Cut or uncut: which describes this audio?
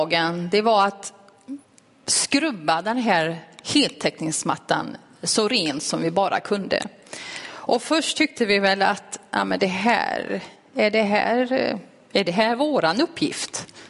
uncut